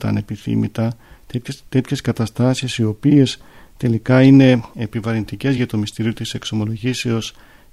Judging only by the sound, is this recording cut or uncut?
uncut